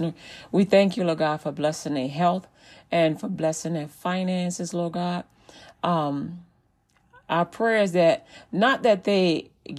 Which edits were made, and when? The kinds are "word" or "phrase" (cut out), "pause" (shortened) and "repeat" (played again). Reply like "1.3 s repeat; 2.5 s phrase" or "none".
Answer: none

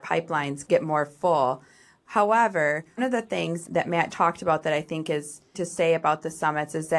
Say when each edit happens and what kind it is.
3.0 s word; 4.1 s word; 5.5 s word

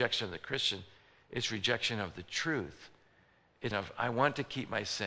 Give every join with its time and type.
3.7 s word

